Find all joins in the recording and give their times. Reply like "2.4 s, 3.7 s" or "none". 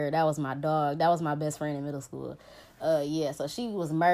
none